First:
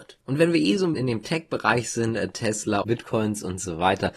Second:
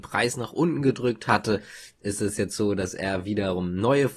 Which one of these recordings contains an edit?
first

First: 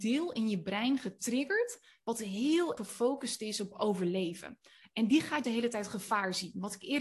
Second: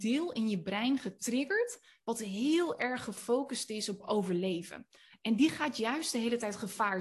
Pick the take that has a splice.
first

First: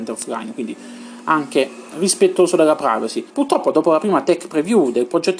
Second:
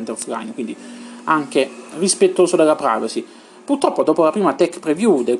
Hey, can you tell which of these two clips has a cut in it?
first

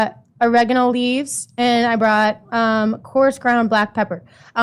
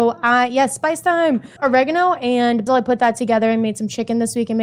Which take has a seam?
second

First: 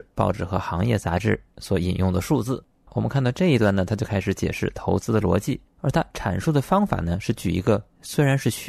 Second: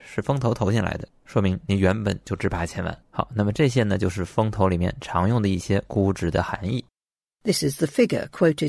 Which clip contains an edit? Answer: second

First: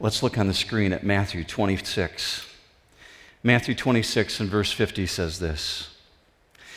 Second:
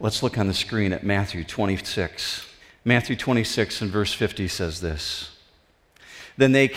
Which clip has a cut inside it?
second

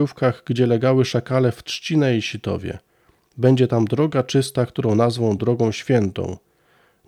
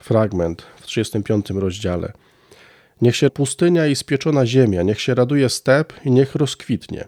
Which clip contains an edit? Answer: second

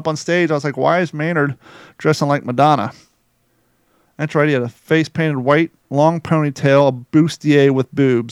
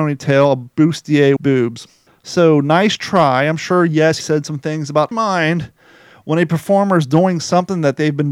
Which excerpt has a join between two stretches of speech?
second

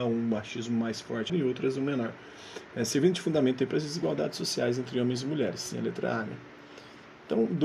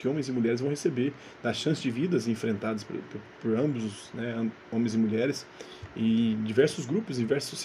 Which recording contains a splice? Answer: first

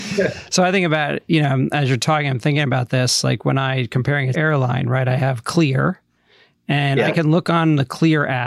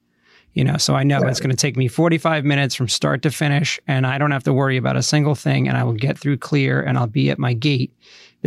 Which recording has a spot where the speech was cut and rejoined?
first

